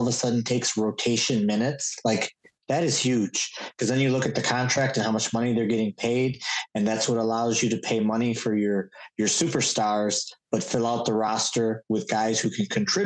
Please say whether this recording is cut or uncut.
uncut